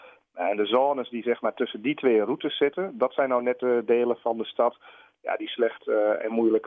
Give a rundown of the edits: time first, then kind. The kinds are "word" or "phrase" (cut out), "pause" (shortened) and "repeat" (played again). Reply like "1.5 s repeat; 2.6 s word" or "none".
none